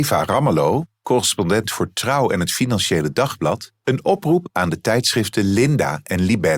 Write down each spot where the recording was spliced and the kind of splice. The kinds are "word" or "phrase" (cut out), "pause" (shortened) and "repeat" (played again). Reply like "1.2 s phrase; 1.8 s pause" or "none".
none